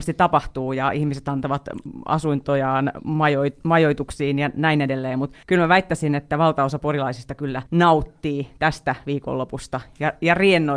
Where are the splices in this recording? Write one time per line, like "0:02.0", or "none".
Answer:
0:05.4
0:07.7